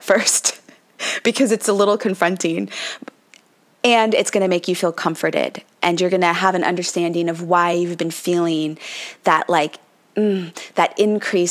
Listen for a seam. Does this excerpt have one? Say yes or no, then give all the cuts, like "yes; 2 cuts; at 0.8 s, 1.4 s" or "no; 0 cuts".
no; 0 cuts